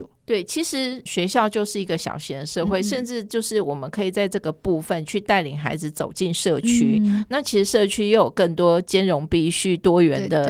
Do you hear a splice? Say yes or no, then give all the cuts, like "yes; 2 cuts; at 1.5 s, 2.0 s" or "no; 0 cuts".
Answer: yes; 1 cut; at 1.1 s